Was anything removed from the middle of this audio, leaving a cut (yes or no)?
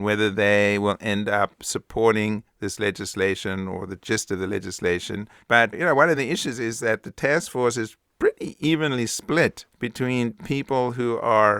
no